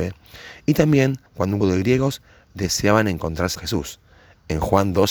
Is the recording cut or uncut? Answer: cut